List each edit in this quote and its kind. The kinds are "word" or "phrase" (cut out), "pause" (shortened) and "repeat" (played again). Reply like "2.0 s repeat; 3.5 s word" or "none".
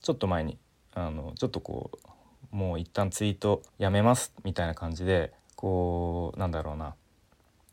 3.7 s pause; 5.4 s pause